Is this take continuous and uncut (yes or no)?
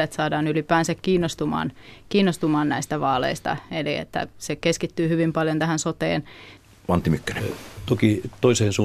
yes